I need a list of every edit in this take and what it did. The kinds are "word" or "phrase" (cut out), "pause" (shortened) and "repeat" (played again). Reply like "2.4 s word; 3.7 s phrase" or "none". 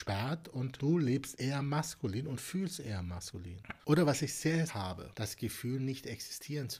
3.8 s pause; 4.7 s phrase

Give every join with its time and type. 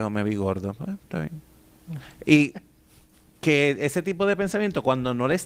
none

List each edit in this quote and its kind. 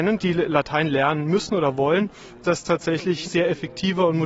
2.4 s word; 3.2 s word

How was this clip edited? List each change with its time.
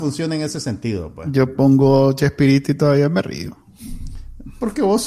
none

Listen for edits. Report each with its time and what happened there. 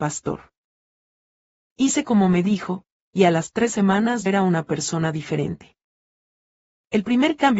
4.3 s word

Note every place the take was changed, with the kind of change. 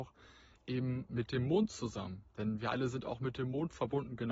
none

